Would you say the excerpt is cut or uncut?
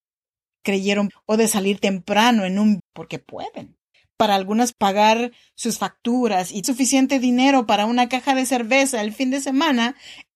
cut